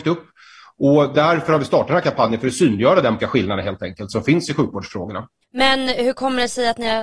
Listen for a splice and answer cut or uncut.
cut